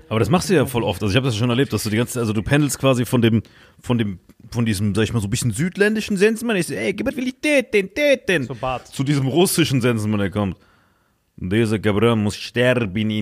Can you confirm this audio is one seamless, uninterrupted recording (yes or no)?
no